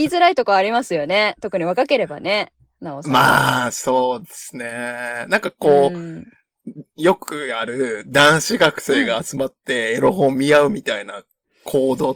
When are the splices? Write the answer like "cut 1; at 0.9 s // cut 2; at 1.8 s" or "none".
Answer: none